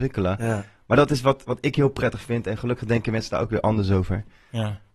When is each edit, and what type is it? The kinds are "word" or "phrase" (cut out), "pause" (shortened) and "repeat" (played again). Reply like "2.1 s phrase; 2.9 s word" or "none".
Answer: none